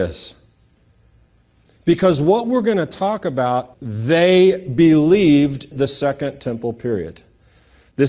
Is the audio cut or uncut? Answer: cut